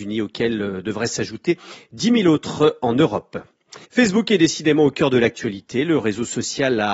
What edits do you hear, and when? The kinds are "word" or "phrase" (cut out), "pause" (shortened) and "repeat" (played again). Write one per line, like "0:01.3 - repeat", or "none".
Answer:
0:03.8 - pause